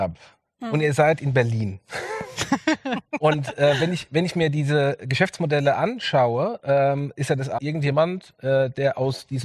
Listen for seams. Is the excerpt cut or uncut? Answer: cut